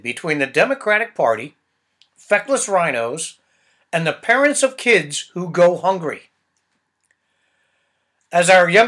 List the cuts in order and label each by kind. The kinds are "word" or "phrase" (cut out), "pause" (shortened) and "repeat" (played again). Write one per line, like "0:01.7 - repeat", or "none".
none